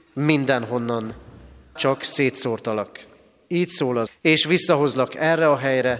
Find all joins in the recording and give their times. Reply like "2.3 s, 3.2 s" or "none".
1.8 s, 4.1 s